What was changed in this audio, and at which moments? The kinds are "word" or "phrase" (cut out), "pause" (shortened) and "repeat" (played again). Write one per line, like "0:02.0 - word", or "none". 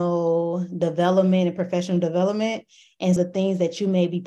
0:03.2 - word